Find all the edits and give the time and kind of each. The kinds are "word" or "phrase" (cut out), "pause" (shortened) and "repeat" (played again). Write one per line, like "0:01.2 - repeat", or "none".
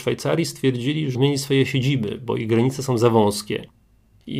0:01.1 - word